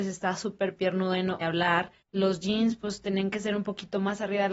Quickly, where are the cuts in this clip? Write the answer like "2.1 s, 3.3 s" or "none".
1.4 s, 2.0 s